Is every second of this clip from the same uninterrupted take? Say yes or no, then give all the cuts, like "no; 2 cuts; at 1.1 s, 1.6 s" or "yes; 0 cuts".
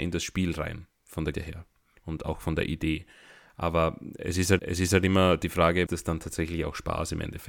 no; 3 cuts; at 1.3 s, 4.6 s, 5.9 s